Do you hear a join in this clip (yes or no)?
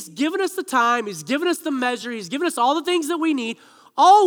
no